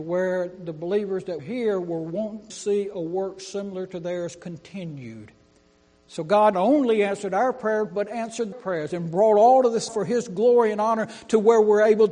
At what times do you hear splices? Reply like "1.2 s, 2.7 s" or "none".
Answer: 1.4 s, 2.5 s, 6.5 s, 8.5 s, 9.9 s